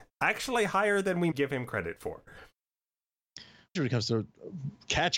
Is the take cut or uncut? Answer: cut